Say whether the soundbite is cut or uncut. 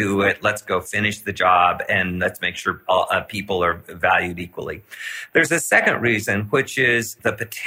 uncut